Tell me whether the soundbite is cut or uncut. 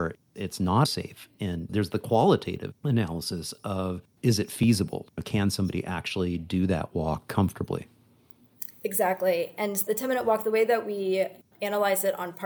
cut